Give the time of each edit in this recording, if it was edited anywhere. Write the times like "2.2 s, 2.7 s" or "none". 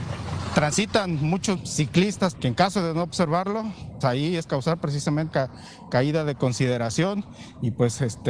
1.6 s, 2.3 s, 4.0 s, 4.5 s, 5.3 s